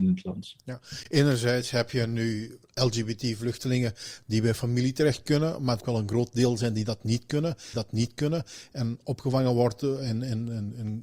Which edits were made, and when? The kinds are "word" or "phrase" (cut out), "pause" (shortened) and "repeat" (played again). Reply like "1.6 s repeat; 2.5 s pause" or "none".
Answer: 2.6 s pause; 5.8 s phrase; 7.7 s repeat